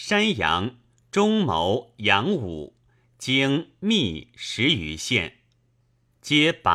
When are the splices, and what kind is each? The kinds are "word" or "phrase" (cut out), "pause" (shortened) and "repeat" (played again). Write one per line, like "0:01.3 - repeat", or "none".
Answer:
none